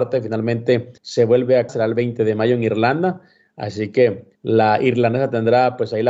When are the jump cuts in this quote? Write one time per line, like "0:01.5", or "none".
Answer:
0:01.0
0:01.7
0:04.3